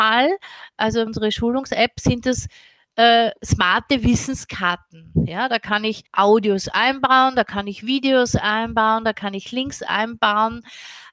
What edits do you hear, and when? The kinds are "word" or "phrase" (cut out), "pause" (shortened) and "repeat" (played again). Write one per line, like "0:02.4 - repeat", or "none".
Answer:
0:01.1 - phrase
0:06.1 - pause